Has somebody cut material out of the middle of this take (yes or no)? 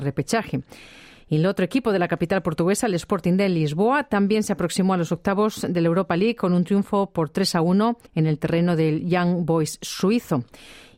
yes